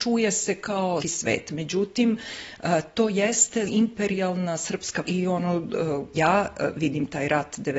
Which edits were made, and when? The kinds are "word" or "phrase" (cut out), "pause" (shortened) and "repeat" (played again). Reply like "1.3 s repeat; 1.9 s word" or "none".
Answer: 1.0 s word; 3.7 s word; 5.0 s word; 6.1 s word